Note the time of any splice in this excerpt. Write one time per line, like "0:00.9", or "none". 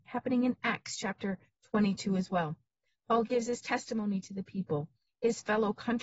none

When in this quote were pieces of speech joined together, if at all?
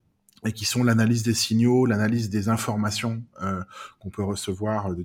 none

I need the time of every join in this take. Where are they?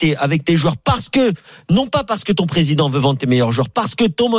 none

